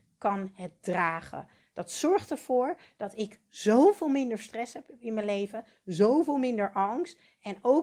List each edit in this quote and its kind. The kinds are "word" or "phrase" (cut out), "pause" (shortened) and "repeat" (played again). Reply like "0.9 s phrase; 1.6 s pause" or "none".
none

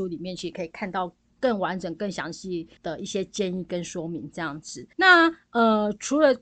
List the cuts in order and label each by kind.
2.8 s pause; 4.9 s pause

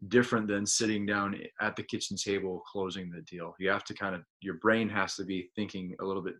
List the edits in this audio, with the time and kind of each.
4.3 s pause

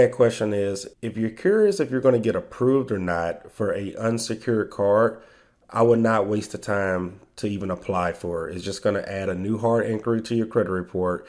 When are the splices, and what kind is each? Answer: 0.9 s pause

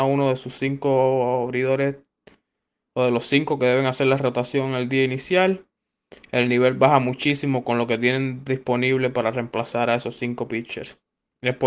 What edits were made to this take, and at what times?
none

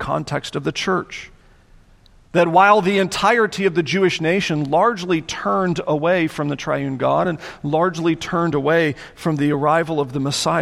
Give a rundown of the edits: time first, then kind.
none

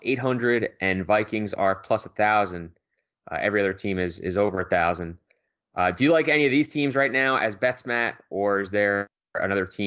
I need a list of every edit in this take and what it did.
none

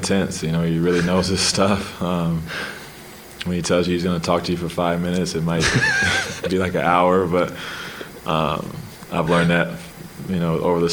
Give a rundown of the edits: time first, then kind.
none

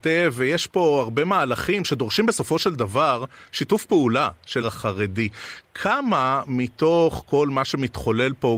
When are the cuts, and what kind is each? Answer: 4.6 s word

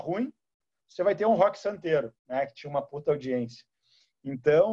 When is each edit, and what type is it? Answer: 2.2 s pause

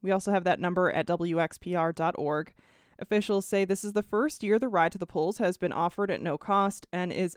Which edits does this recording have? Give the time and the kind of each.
none

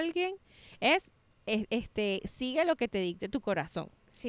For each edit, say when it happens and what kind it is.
none

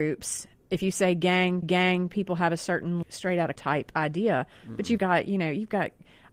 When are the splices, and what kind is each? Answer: 1.6 s repeat; 3.0 s word; 3.6 s word; 5.0 s word

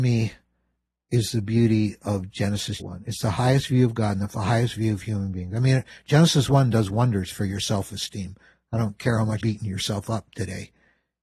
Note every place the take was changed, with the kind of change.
2.8 s word; 9.4 s word

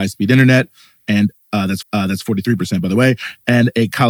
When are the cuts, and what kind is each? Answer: 1.8 s repeat

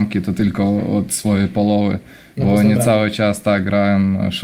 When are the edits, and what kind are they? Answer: none

